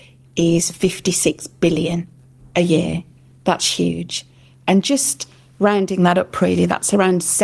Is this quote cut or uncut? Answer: uncut